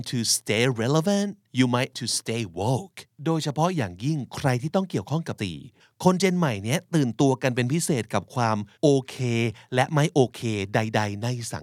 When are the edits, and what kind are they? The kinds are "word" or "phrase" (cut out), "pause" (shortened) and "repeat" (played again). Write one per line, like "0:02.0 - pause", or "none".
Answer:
0:01.5 - pause
0:01.9 - word
0:03.1 - pause
0:05.4 - word
0:05.8 - pause
0:08.7 - pause